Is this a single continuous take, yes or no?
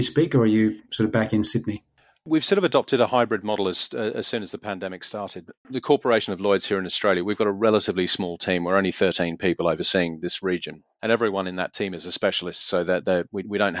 yes